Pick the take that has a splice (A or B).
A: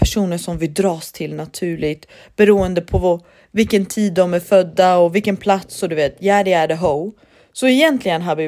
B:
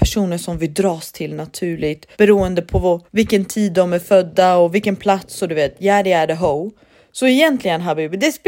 B